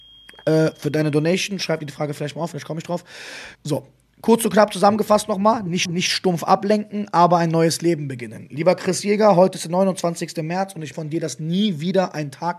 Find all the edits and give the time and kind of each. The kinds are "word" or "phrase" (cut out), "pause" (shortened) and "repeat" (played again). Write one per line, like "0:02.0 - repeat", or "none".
0:03.6 - pause
0:05.9 - repeat
0:10.9 - word